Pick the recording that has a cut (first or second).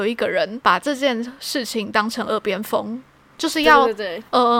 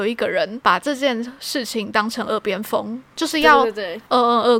second